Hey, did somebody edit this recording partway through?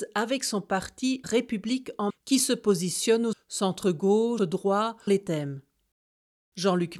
yes; 5 cuts; at 1.2 s, 2.1 s, 3.3 s, 4.4 s, 5.1 s

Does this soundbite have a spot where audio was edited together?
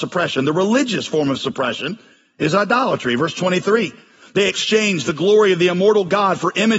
no; 0 cuts

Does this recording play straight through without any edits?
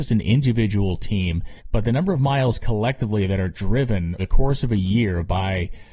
no; 2 cuts; at 1.6 s, 4.2 s

